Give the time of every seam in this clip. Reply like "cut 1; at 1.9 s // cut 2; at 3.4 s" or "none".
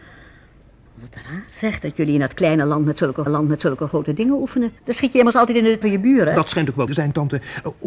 cut 1; at 3.3 s // cut 2; at 4.8 s // cut 3; at 5.8 s // cut 4; at 6.9 s